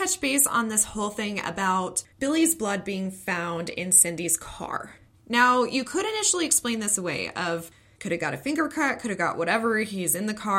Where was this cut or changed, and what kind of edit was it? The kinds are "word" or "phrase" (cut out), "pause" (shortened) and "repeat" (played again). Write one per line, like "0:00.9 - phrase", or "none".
0:02.1 - pause